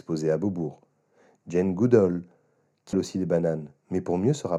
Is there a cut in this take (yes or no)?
yes